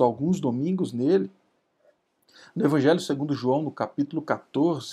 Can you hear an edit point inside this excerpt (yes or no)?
no